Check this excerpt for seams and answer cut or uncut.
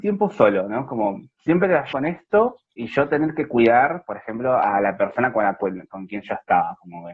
cut